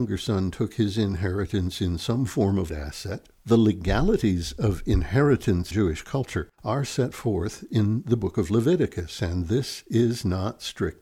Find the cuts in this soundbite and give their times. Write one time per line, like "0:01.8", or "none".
0:02.7
0:03.4
0:05.7
0:06.5